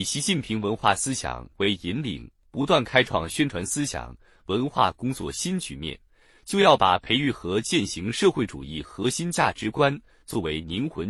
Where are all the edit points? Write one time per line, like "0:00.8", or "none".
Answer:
none